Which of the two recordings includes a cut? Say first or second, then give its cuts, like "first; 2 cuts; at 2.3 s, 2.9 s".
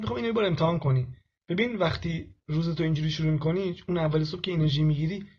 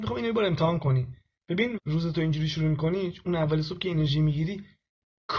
second; 1 cut; at 1.8 s